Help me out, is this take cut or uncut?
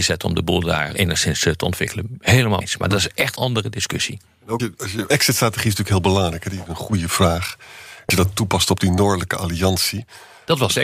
cut